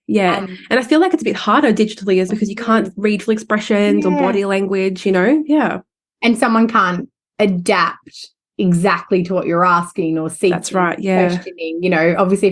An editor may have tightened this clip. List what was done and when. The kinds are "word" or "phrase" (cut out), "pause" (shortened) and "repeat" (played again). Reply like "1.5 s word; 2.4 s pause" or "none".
2.3 s word; 3.2 s word